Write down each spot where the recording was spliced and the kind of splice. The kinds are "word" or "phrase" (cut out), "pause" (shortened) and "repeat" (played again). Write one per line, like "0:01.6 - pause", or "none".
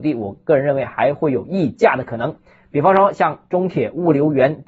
none